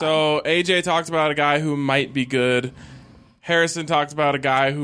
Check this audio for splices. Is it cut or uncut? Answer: uncut